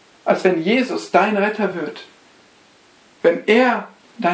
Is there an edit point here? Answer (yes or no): no